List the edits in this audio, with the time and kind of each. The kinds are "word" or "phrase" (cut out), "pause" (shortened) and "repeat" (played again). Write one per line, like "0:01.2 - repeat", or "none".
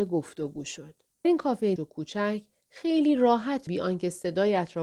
0:01.2 - word
0:01.8 - word
0:03.7 - word